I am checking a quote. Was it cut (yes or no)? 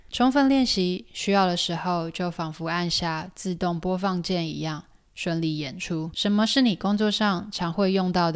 no